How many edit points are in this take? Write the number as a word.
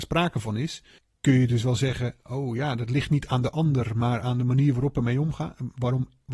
one